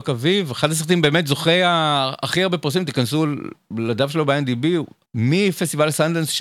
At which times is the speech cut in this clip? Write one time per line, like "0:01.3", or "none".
0:05.1

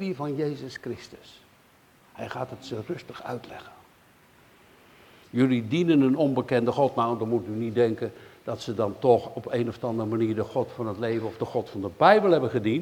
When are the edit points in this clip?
none

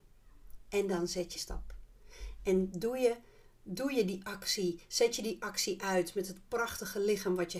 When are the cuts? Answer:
0:01.4

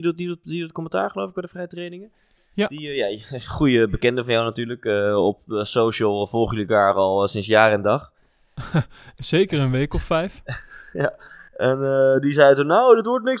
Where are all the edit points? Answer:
0:11.5

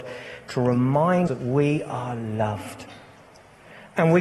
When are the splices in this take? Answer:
0:01.3

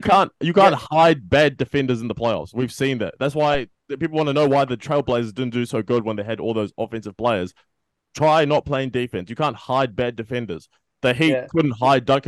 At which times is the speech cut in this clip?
none

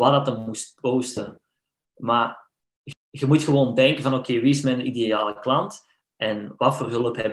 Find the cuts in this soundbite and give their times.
0:02.9

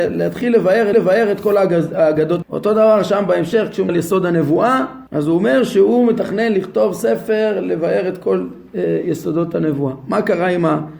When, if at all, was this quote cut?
0:00.9
0:02.4
0:03.9
0:05.1

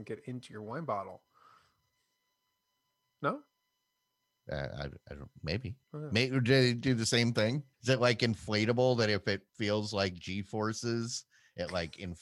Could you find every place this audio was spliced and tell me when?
0:05.8
0:07.7
0:09.5

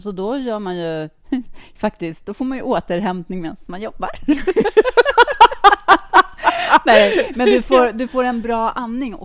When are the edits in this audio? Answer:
none

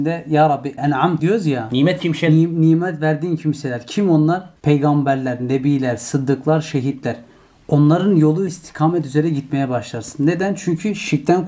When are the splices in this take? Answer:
0:01.2
0:02.0
0:04.6
0:08.5

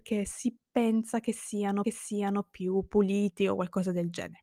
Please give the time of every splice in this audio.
0:01.8

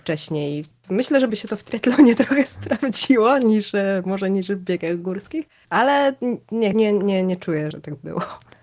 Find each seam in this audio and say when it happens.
0:01.3
0:06.7
0:07.7

